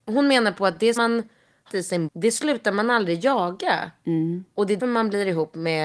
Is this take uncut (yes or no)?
no